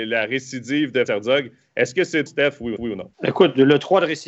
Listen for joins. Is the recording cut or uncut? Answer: cut